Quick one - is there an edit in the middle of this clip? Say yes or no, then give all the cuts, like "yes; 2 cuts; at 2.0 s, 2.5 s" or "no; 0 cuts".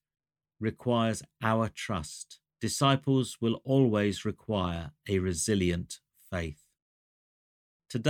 yes; 1 cut; at 2.5 s